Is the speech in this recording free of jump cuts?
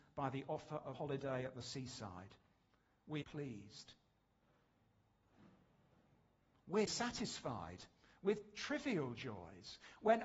no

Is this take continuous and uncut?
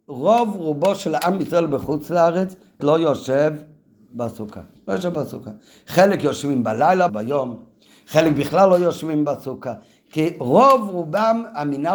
no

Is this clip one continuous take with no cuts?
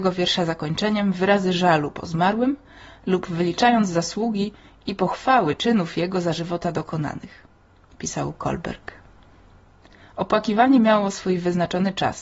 yes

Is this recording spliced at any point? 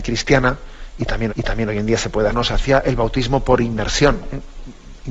yes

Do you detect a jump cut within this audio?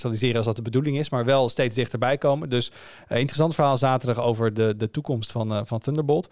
no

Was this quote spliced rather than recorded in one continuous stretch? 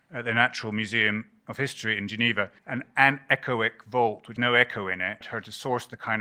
yes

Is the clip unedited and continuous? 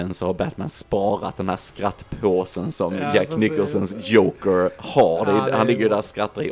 yes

